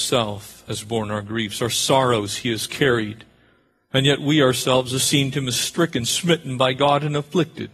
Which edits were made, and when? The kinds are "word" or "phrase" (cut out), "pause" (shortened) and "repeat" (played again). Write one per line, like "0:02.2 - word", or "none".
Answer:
none